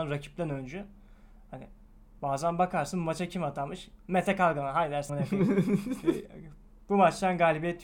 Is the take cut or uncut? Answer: cut